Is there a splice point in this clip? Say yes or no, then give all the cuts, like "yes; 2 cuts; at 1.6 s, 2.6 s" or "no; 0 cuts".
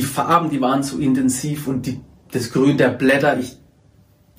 no; 0 cuts